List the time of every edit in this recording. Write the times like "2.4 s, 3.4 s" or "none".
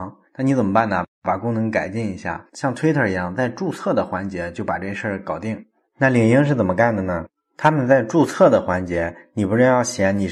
none